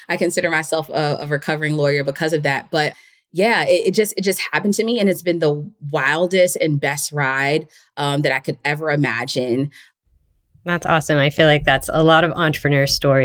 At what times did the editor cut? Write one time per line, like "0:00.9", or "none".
none